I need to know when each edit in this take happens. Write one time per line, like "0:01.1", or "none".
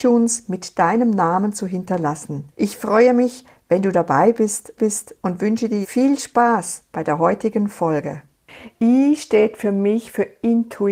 0:02.5
0:04.8
0:05.8